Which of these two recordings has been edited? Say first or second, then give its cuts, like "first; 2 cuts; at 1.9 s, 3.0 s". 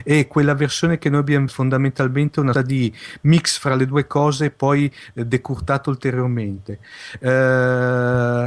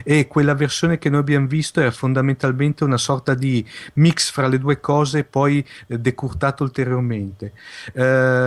first; 2 cuts; at 1.5 s, 2.5 s